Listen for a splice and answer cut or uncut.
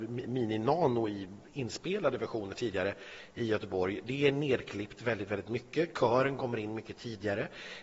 cut